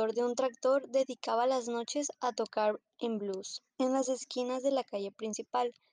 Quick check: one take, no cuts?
no; 1 cut; at 3.7 s

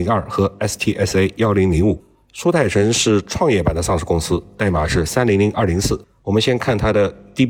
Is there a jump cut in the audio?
no; 0 cuts

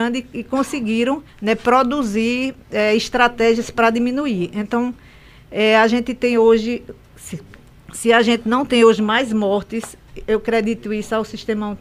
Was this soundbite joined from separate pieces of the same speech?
yes; 1 cut; at 1.3 s

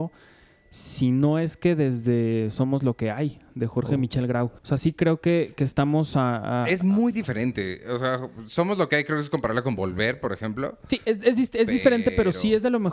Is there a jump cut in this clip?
yes; 1 cut; at 4.6 s

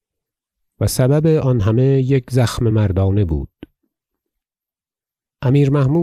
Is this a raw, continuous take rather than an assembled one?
yes; 0 cuts

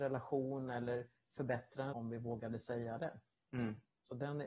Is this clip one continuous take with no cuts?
no; 1 cut; at 1.9 s

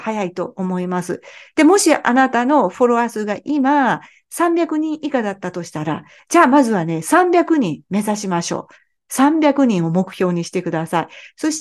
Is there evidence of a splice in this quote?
no; 0 cuts

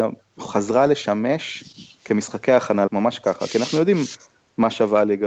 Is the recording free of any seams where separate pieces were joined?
no; 1 cut; at 2.9 s

